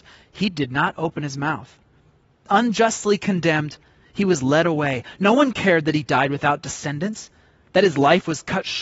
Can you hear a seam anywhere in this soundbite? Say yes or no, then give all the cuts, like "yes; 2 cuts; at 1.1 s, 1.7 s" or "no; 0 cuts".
no; 0 cuts